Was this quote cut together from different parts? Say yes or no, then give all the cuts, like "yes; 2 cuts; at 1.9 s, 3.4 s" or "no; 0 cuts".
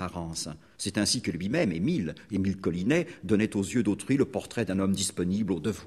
no; 0 cuts